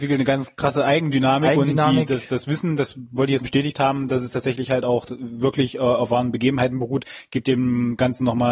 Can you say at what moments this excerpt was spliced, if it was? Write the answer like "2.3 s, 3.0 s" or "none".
3.4 s